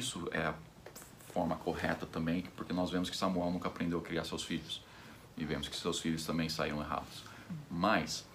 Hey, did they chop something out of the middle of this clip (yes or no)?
no